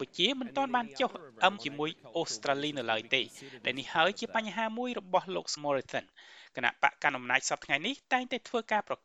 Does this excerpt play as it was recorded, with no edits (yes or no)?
no